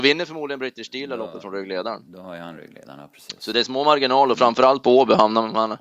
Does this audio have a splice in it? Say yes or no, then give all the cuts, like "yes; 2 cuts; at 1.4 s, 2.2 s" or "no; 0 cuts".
no; 0 cuts